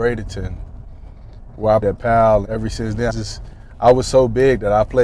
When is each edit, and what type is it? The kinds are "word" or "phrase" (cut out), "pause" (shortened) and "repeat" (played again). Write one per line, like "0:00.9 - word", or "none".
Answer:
0:01.8 - word
0:02.4 - word
0:03.1 - word